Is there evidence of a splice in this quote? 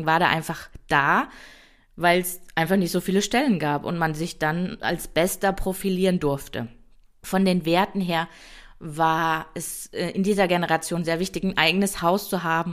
no; 0 cuts

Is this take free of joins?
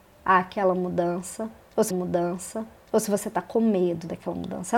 no; 1 cut; at 1.9 s

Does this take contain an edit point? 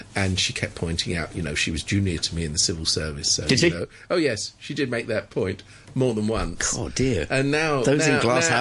no; 0 cuts

